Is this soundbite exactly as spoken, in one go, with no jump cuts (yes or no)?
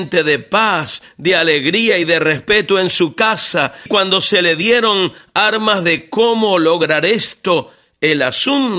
no